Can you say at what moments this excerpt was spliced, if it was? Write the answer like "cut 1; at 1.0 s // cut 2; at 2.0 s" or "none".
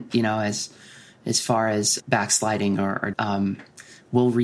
cut 1; at 2.0 s // cut 2; at 3.1 s